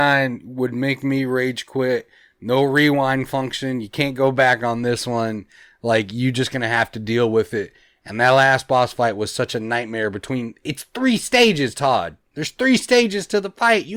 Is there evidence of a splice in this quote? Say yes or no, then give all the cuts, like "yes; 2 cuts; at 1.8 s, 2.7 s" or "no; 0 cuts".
no; 0 cuts